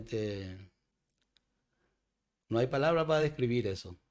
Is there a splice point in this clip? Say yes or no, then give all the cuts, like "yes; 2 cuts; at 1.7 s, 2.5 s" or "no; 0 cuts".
no; 0 cuts